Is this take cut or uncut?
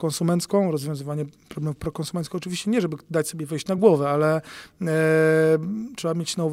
uncut